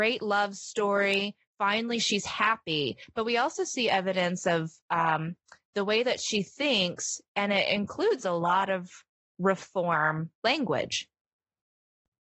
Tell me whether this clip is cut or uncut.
uncut